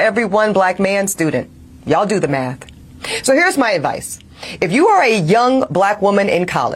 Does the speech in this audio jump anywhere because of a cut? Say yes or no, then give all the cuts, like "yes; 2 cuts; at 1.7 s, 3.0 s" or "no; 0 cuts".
no; 0 cuts